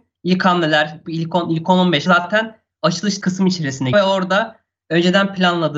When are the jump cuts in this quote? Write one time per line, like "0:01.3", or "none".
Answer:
0:01.0
0:02.1
0:03.2
0:03.9